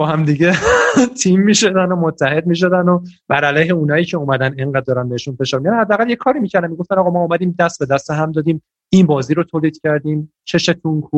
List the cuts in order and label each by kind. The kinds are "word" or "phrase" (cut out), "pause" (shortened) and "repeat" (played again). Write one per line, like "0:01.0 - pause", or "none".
0:03.2 - pause